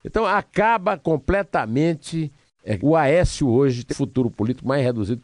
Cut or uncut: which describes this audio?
cut